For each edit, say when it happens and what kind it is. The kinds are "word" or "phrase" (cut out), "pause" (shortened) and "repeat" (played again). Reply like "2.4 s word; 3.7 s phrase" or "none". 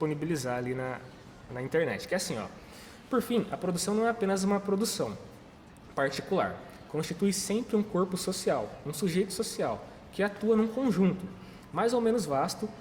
none